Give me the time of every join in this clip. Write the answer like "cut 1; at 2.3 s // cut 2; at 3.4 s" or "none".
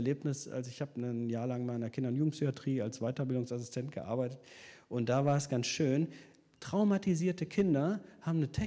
none